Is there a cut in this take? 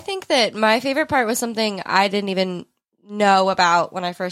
no; 0 cuts

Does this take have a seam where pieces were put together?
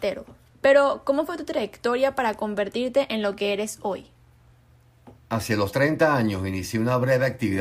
no; 0 cuts

